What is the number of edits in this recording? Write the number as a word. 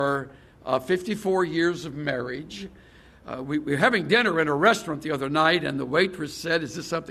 zero